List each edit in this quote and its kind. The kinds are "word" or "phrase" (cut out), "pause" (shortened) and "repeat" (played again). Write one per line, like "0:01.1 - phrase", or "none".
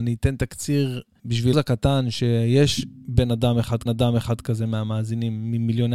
0:01.2 - word
0:01.5 - word
0:03.9 - repeat